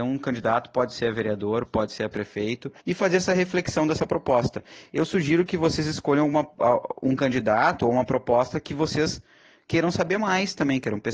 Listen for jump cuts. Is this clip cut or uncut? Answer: cut